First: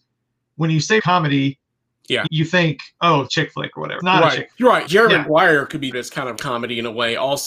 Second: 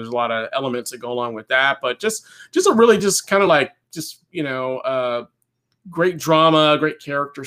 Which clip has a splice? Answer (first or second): first